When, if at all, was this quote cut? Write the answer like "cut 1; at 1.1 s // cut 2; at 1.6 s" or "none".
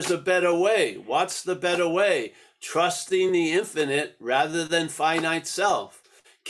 none